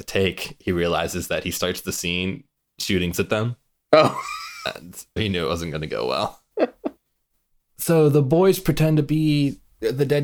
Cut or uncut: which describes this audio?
cut